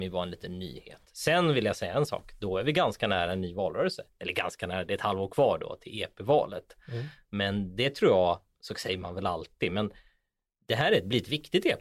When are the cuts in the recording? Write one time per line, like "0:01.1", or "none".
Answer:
none